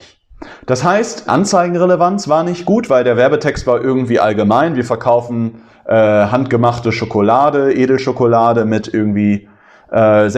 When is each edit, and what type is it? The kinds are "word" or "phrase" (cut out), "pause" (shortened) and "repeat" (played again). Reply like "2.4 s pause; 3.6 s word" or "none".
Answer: 1.3 s word